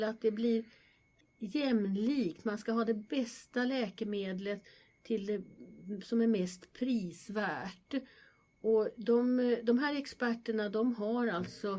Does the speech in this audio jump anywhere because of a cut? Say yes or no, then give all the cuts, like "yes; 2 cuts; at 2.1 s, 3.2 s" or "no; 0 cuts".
no; 0 cuts